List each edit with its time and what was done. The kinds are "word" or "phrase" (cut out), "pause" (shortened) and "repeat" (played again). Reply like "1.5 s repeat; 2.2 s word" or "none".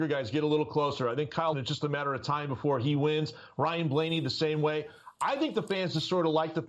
1.5 s word